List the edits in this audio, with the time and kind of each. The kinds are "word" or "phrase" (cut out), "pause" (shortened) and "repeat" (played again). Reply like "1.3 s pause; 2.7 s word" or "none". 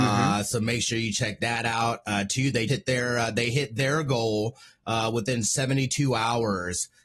2.7 s word